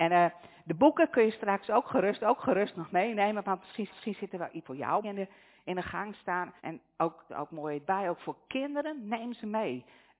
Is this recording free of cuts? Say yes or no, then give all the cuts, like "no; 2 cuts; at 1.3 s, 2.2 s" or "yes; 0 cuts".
no; 7 cuts; at 2.2 s, 3.9 s, 4.6 s, 5.0 s, 6.6 s, 7.3 s, 7.8 s